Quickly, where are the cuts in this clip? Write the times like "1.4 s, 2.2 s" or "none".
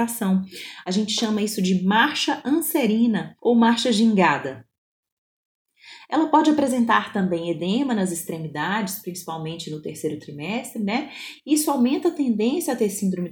3.4 s